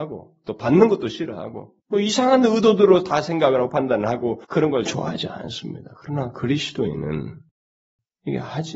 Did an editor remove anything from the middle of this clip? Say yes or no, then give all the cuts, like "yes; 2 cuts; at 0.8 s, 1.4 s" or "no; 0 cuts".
yes; 2 cuts; at 1.8 s, 4.4 s